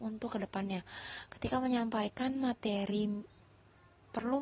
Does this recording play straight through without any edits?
yes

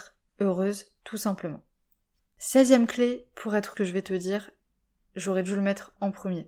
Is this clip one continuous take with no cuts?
no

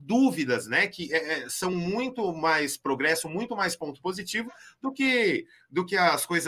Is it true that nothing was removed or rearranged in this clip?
yes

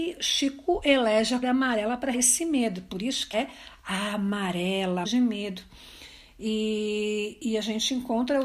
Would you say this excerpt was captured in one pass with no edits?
no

